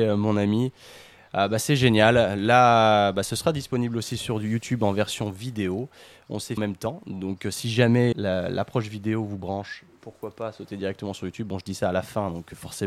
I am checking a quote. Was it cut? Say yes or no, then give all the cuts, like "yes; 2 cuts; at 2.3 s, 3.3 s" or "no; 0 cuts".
yes; 2 cuts; at 6.6 s, 8.1 s